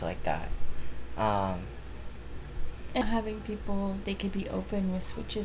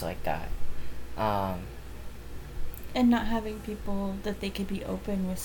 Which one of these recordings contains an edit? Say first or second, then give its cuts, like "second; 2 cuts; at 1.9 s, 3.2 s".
first; 2 cuts; at 3.0 s, 4.0 s